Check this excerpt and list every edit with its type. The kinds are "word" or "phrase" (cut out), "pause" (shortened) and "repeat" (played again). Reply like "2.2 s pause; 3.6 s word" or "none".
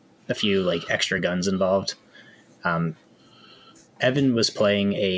none